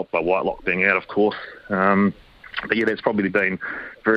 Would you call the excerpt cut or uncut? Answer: uncut